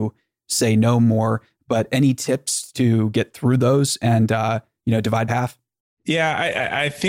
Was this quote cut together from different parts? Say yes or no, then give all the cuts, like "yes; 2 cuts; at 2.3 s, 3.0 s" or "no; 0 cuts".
yes; 1 cut; at 5.3 s